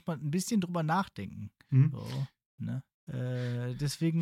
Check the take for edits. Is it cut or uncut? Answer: cut